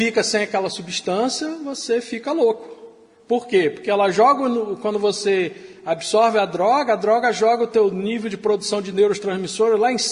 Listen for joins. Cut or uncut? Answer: uncut